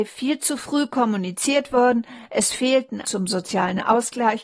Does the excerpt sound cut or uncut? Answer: cut